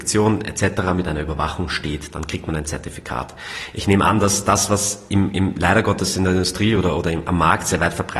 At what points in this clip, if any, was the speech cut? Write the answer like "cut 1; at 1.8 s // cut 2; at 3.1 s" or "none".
none